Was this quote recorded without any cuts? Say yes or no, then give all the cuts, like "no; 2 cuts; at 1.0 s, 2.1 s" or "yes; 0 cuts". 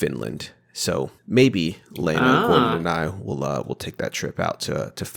no; 1 cut; at 1.2 s